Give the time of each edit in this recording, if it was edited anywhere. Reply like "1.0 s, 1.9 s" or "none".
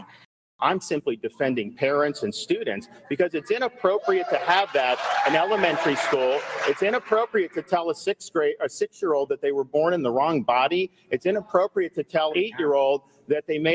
12.3 s